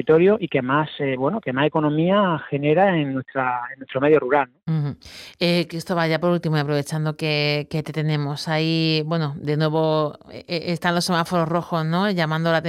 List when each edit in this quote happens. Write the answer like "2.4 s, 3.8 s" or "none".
none

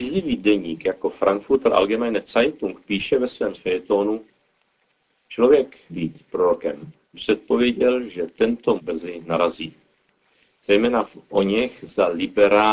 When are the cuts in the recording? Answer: 3.5 s, 5.9 s, 7.1 s, 8.8 s

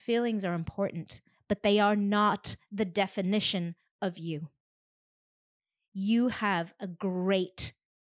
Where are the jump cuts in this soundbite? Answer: none

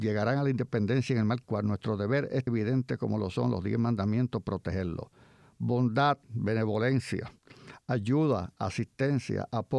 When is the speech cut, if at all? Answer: 1.4 s, 2.5 s, 6.2 s

